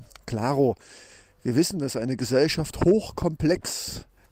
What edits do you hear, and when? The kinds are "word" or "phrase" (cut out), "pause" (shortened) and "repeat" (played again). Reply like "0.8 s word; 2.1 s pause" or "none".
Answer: none